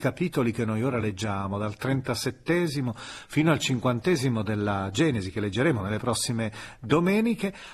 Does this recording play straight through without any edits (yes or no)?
yes